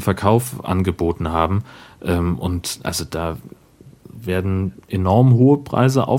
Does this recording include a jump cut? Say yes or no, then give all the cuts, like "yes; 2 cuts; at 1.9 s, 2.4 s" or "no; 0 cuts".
no; 0 cuts